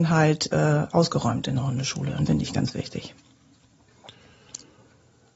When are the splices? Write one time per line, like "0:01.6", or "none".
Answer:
0:02.3